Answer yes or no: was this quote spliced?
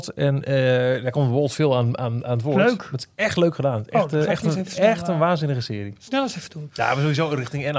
no